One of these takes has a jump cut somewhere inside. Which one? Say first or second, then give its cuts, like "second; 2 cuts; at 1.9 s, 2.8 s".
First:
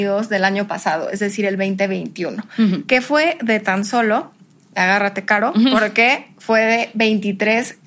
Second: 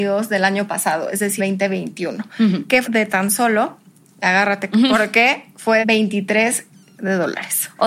second; 5 cuts; at 1.4 s, 2.8 s, 4.7 s, 5.8 s, 7.0 s